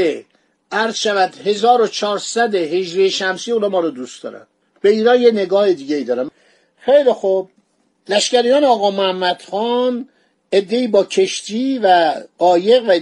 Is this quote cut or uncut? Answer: uncut